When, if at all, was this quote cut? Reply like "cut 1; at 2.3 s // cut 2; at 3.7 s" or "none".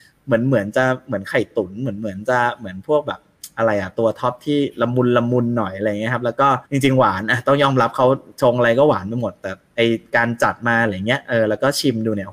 cut 1; at 6.6 s